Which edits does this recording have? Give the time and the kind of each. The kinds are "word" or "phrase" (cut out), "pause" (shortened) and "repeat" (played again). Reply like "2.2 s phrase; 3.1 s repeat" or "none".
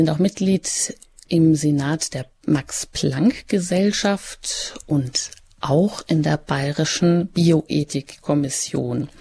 none